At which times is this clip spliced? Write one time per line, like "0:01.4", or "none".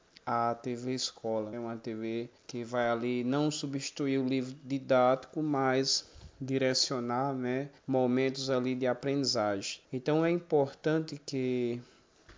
0:01.5
0:02.4
0:07.8
0:09.8